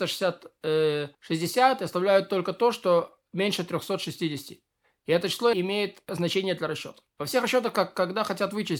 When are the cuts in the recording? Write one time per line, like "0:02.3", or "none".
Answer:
0:01.1
0:05.5
0:06.1
0:07.1